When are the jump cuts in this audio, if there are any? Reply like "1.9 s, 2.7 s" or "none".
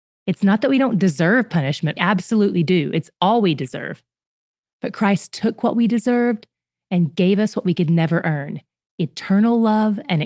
2.0 s

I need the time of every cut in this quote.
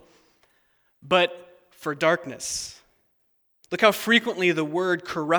none

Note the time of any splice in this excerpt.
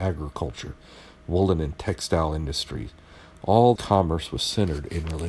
3.8 s

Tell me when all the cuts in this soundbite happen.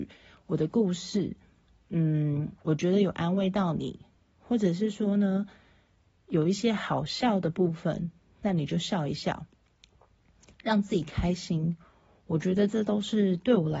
none

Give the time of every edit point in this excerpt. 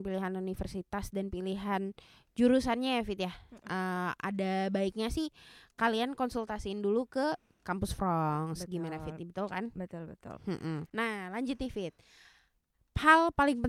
none

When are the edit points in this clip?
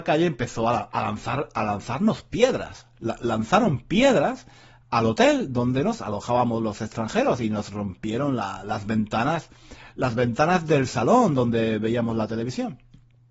none

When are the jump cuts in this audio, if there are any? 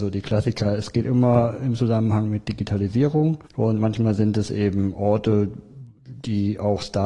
3.5 s

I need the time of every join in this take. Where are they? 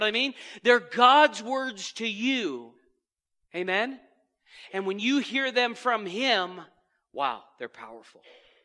none

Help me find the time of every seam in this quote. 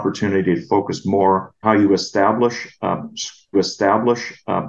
1.6 s, 3.5 s

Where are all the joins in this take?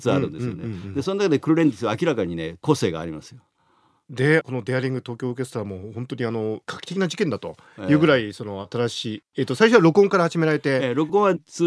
none

